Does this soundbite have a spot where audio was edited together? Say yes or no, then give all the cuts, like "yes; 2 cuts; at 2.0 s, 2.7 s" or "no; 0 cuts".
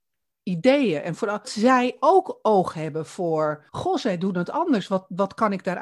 yes; 2 cuts; at 1.4 s, 3.7 s